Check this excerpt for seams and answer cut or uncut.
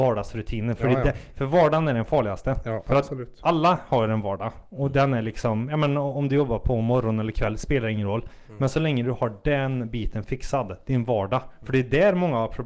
uncut